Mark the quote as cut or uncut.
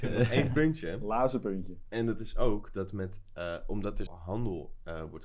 cut